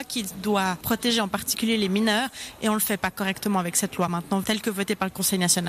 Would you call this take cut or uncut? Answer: uncut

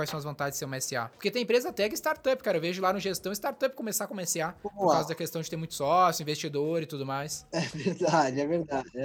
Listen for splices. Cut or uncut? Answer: uncut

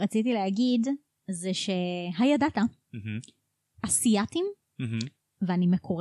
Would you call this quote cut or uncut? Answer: uncut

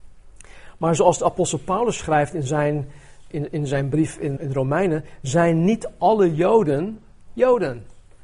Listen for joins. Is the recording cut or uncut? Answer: cut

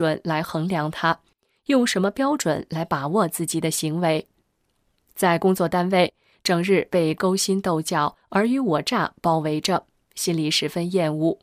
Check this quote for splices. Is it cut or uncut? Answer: uncut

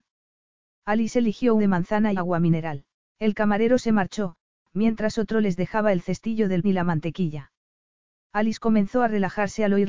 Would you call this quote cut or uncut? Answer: cut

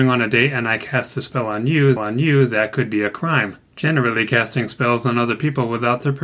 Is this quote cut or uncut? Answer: cut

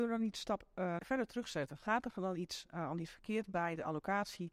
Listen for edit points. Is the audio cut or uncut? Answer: cut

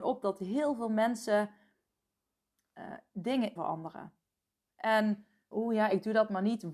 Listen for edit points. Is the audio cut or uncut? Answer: cut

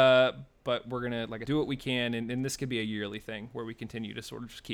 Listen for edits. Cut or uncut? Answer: cut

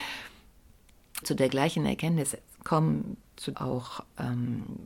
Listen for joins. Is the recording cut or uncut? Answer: cut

